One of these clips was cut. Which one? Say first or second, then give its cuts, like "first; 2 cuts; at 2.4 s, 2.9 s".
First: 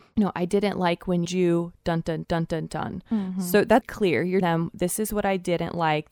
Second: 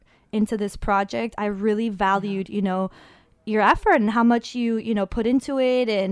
first; 4 cuts; at 1.2 s, 2.2 s, 3.8 s, 4.4 s